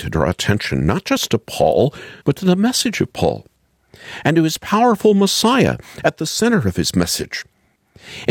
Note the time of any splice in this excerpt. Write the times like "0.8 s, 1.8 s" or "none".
2.2 s

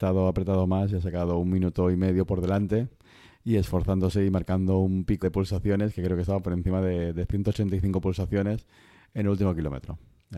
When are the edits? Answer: 5.2 s

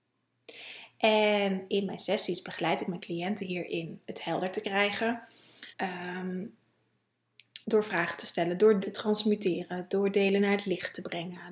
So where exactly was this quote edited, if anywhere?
4.0 s, 5.7 s, 7.6 s, 8.8 s

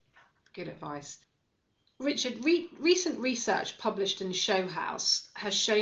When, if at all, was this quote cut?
none

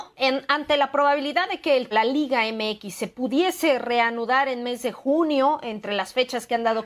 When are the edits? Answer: 1.9 s

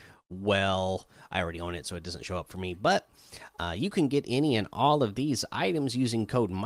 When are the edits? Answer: none

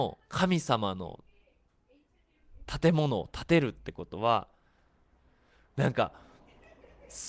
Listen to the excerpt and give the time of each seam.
none

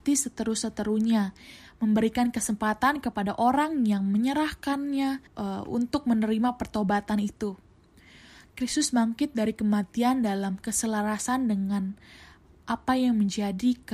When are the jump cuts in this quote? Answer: 5.3 s

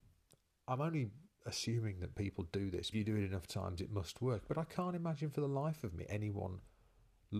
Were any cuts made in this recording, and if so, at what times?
2.9 s

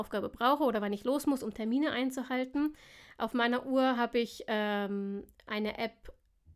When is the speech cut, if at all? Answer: none

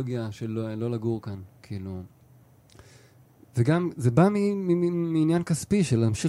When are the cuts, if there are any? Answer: none

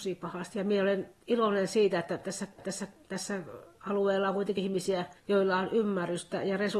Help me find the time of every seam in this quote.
1.2 s, 2.6 s, 4.6 s, 5.2 s

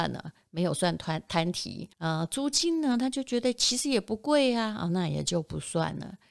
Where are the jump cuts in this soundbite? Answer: 1.9 s

